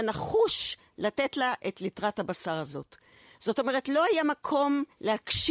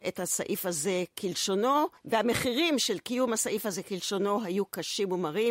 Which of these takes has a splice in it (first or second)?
second